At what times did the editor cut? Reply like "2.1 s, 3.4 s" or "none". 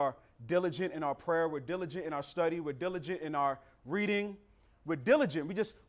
none